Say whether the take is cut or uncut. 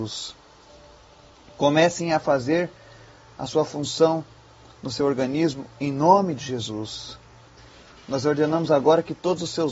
uncut